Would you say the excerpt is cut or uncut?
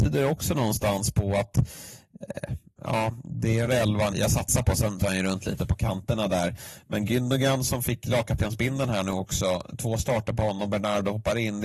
cut